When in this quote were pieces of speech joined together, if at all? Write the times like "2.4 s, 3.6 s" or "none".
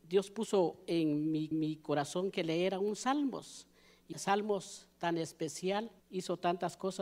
1.5 s, 4.1 s, 6.0 s